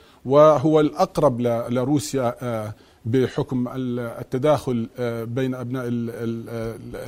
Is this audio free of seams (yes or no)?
yes